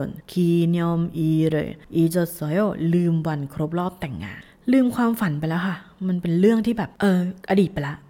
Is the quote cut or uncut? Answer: uncut